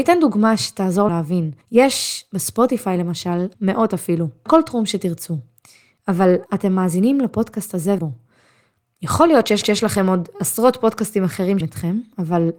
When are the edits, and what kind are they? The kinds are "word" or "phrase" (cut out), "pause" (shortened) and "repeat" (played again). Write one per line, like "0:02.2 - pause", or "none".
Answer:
0:01.1 - word
0:01.6 - pause
0:03.5 - phrase
0:04.5 - word
0:06.5 - word
0:08.0 - word
0:09.6 - repeat
0:11.6 - word